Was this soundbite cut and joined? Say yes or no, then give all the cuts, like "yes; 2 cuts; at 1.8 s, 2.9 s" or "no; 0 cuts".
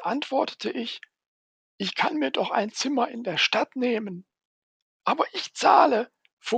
no; 0 cuts